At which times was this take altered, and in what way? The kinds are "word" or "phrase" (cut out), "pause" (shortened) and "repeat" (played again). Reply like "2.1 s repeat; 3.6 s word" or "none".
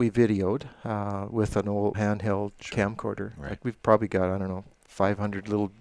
1.9 s phrase; 4.7 s pause